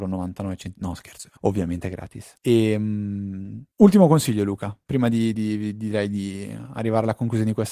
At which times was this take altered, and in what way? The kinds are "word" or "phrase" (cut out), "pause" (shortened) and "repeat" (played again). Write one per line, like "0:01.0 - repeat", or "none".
0:01.4 - phrase
0:02.4 - pause
0:03.7 - pause
0:05.3 - word